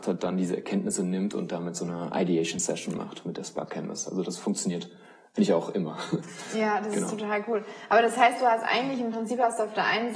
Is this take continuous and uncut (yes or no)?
yes